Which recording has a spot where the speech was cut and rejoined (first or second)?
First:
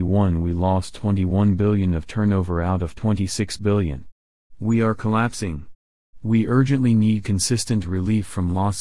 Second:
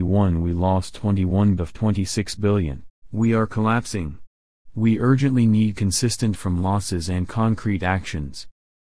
second